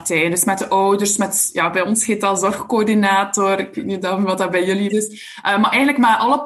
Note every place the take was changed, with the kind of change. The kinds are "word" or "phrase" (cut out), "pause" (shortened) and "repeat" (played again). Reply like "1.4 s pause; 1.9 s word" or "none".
4.9 s word